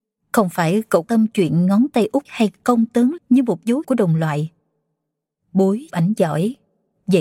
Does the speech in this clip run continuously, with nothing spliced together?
no; 5 cuts; at 1.0 s, 2.3 s, 3.2 s, 3.8 s, 5.9 s

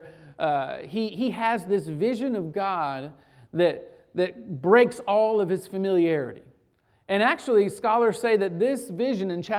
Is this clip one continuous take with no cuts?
yes; 0 cuts

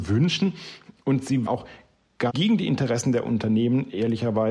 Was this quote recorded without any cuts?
no; 2 cuts; at 1.5 s, 2.3 s

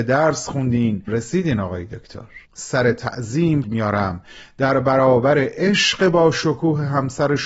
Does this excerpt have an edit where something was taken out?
yes; 3 cuts; at 1.1 s, 2.4 s, 3.6 s

